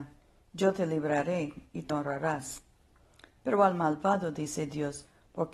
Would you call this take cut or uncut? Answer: cut